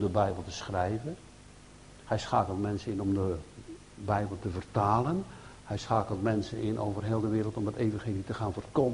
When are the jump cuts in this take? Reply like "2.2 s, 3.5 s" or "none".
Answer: none